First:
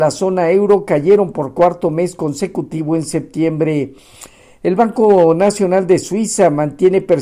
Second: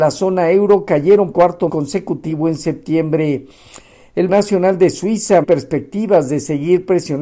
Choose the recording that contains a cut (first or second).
second